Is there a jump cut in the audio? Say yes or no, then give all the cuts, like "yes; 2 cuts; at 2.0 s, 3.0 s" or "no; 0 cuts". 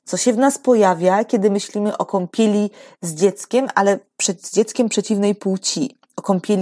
no; 0 cuts